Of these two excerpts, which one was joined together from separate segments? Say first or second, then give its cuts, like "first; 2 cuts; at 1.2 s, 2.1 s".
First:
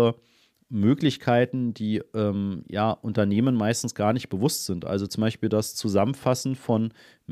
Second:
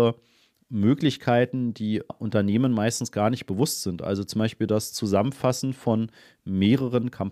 second; 1 cut; at 2.1 s